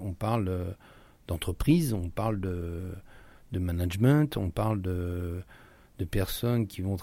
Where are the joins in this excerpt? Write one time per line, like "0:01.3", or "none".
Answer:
none